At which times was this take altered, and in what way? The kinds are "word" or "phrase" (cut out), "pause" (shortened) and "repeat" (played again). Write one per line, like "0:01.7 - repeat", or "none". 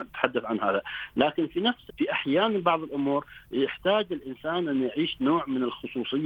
0:01.9 - word